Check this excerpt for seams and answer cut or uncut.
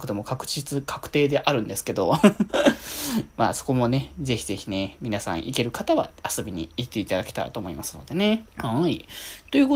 cut